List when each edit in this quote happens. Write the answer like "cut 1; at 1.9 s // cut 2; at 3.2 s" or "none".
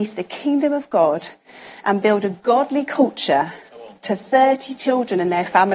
none